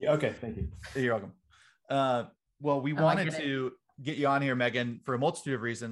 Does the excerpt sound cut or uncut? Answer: uncut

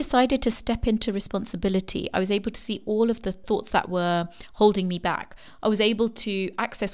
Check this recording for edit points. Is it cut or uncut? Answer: uncut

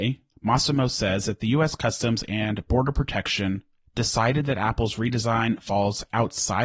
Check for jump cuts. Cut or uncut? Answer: uncut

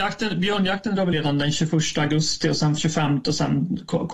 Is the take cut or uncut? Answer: cut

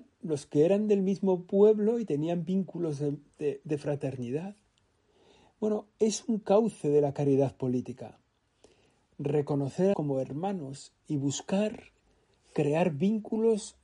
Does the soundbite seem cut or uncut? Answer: cut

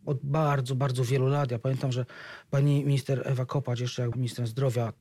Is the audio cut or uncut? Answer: cut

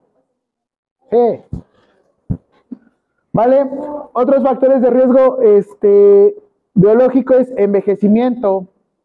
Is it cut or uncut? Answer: uncut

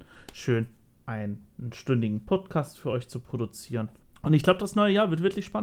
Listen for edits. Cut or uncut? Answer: uncut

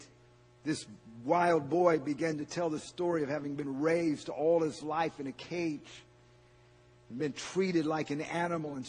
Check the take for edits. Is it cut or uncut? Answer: uncut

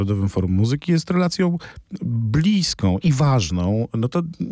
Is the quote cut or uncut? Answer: uncut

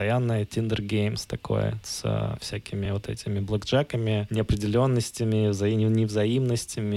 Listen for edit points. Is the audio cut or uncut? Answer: uncut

